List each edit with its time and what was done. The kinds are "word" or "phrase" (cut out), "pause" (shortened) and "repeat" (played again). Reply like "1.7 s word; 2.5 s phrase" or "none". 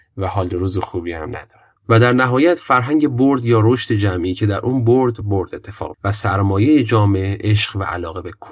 1.8 s pause; 5.2 s word; 5.9 s word